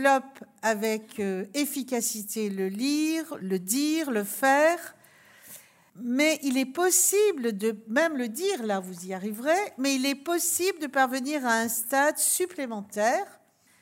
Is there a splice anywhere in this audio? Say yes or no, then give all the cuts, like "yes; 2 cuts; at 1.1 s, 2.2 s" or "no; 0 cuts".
yes; 1 cut; at 3.4 s